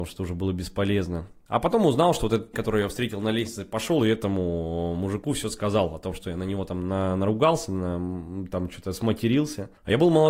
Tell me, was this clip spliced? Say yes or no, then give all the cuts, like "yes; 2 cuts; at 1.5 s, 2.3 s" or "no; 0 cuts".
yes; 1 cut; at 2.5 s